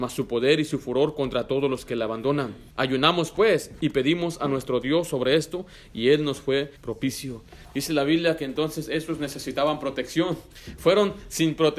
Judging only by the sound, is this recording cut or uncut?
cut